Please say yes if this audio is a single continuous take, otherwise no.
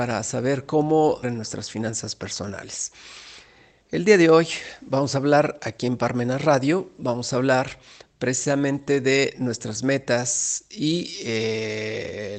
no